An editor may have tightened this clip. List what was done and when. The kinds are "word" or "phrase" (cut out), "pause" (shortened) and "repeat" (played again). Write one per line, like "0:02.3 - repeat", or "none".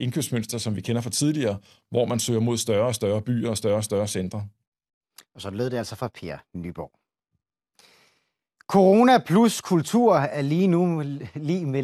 none

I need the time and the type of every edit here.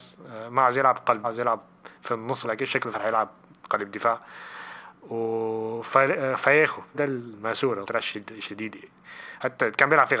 0:01.2 - word
0:01.9 - pause
0:02.4 - phrase
0:02.9 - word
0:03.5 - pause
0:06.9 - word
0:07.8 - phrase

